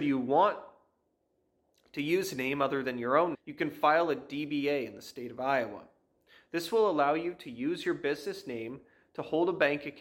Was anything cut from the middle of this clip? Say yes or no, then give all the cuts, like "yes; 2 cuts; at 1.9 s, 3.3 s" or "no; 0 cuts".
yes; 1 cut; at 3.3 s